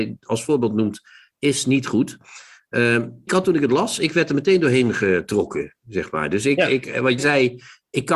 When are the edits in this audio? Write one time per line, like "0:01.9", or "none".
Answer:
0:03.3
0:07.2

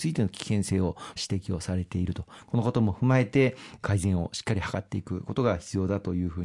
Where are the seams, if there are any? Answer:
0:01.2

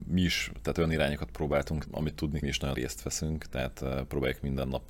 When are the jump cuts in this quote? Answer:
0:01.9
0:02.4
0:02.7

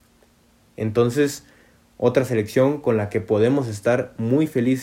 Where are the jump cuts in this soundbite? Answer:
none

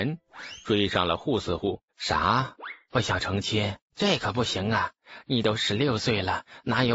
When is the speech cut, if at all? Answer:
0:01.9
0:03.8

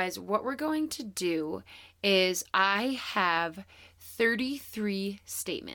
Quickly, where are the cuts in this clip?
none

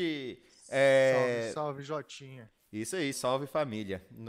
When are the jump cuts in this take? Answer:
0:03.1

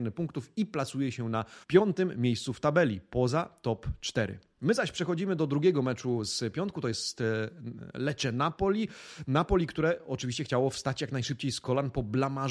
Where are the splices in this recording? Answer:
0:01.6

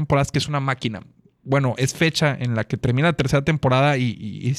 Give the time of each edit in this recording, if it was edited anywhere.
none

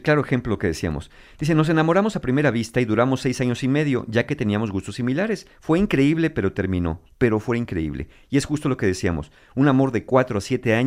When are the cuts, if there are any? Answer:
none

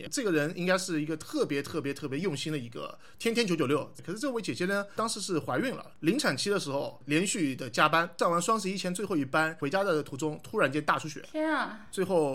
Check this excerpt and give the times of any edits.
0:05.9

